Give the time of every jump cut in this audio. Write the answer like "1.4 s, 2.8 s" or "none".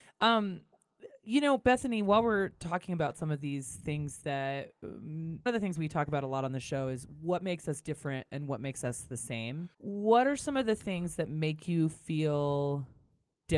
5.5 s, 9.7 s

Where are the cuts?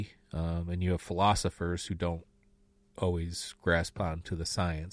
none

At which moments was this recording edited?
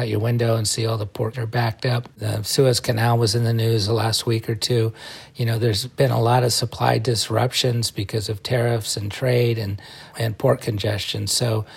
1.3 s, 2.1 s, 10.1 s

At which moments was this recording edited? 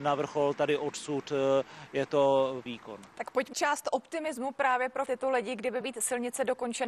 2.7 s, 3.5 s, 5.1 s, 5.8 s

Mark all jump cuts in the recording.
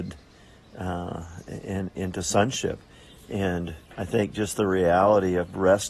3.8 s

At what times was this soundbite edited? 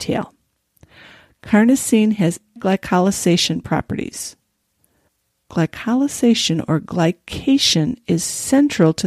2.6 s, 5.1 s

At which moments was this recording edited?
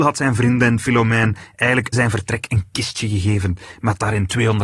1.9 s

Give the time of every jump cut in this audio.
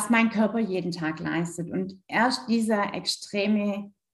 none

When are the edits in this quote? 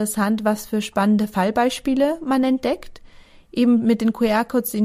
none

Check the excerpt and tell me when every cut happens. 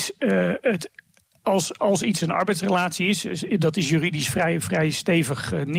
none

